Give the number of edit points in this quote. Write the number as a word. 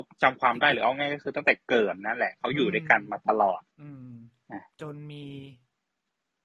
two